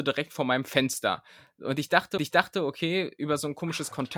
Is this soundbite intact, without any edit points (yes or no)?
no